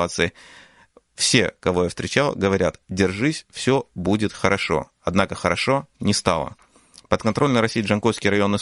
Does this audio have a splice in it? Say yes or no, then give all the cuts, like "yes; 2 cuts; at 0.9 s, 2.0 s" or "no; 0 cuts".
no; 0 cuts